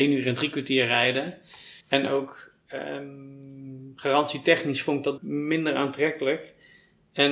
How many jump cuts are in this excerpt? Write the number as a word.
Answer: two